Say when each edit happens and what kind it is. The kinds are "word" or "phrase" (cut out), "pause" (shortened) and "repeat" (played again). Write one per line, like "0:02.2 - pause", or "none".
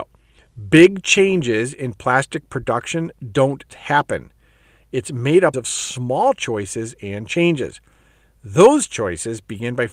0:03.7 - word
0:05.5 - phrase